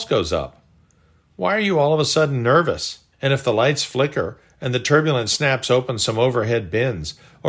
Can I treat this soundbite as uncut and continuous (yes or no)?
no